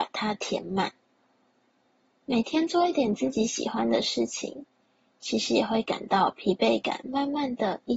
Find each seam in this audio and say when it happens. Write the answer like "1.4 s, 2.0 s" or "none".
none